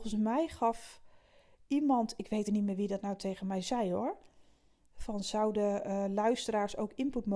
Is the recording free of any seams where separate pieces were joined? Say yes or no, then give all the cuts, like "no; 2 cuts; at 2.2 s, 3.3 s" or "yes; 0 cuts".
no; 1 cut; at 2.4 s